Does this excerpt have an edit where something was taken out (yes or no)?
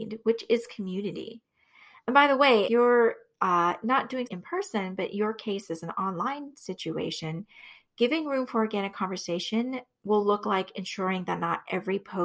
yes